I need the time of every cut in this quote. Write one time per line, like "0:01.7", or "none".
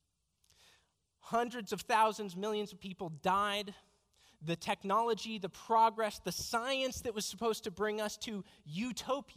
none